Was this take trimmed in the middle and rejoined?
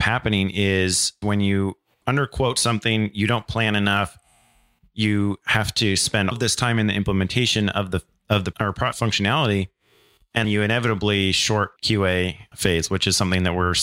yes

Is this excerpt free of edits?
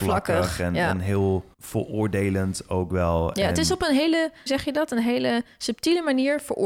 no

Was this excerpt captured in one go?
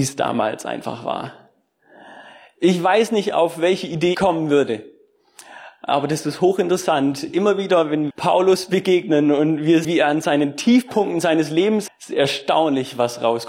no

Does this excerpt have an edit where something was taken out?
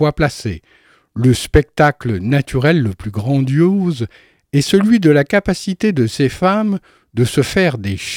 no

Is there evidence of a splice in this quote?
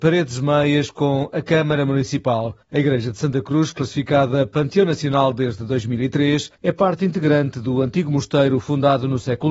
yes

